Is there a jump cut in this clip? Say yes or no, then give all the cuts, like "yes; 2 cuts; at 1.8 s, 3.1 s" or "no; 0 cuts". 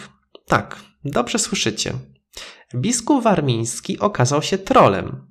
no; 0 cuts